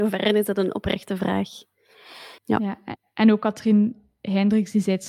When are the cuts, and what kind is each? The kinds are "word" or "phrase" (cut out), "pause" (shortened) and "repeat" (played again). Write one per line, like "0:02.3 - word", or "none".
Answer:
0:02.4 - pause